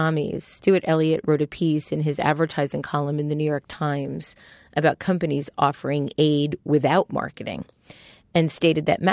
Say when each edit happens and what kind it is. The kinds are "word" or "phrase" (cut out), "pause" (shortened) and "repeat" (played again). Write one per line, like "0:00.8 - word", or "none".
none